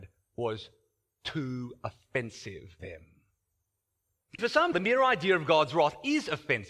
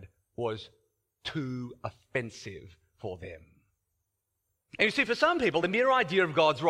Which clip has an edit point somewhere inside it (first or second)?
first